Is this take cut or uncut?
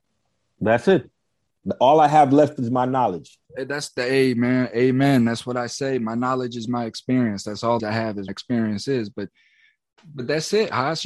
cut